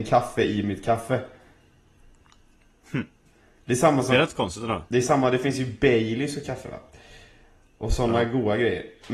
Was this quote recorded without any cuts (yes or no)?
yes